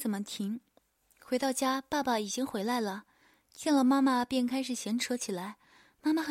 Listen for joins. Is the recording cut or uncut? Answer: uncut